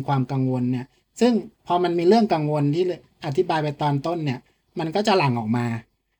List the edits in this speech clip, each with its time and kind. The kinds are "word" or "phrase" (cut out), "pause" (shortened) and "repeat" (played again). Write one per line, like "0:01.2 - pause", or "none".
none